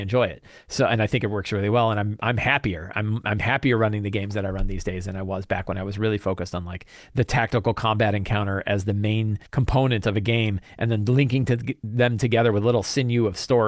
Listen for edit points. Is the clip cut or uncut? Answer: cut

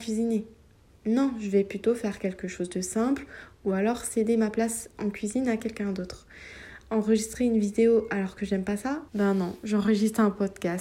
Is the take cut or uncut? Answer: cut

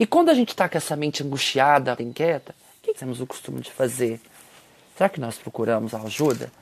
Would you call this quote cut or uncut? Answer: cut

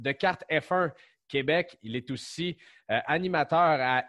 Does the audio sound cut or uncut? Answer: uncut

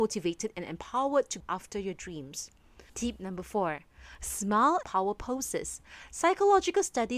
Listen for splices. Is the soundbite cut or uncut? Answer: cut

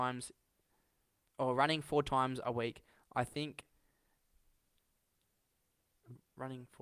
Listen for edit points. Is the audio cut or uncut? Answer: uncut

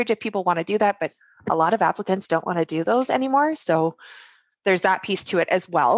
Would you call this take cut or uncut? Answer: uncut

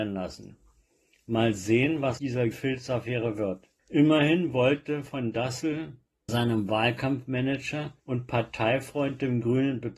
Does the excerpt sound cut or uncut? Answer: cut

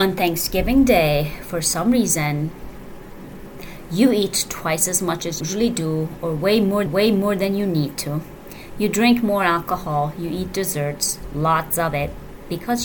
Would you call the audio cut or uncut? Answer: cut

